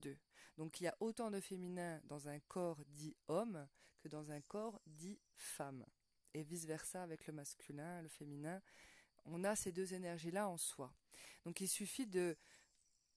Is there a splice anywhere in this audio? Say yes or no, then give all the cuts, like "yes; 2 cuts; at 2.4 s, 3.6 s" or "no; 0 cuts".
no; 0 cuts